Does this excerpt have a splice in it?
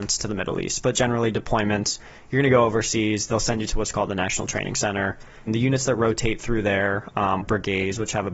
yes; 3 cuts; at 0.9 s, 5.5 s, 7.4 s

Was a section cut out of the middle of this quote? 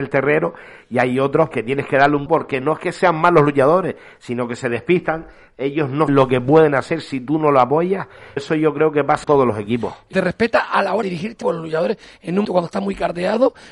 yes; 9 cuts; at 1.5 s, 2.3 s, 6.1 s, 8.4 s, 9.2 s, 10.1 s, 11.0 s, 11.4 s, 12.4 s

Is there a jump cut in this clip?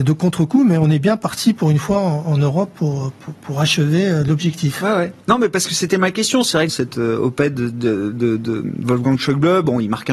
yes; 1 cut; at 6.7 s

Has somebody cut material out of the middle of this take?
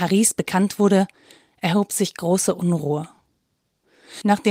no; 0 cuts

